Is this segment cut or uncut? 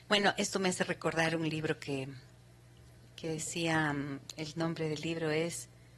uncut